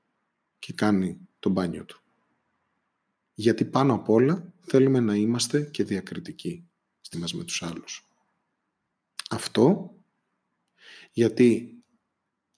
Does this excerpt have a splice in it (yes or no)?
yes